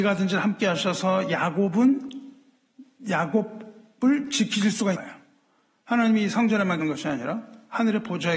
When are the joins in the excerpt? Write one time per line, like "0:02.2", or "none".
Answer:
0:04.9
0:06.8